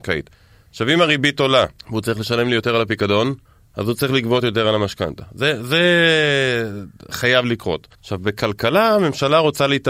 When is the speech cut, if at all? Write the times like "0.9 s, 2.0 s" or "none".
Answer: 1.8 s, 3.4 s, 7.9 s